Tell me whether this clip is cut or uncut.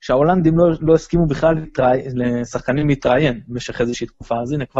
uncut